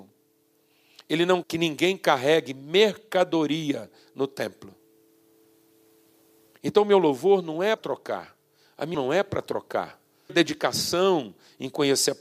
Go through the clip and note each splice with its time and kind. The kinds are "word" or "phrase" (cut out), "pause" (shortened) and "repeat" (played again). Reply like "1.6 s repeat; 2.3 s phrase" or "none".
1.4 s word; 7.8 s word; 8.9 s word; 10.3 s word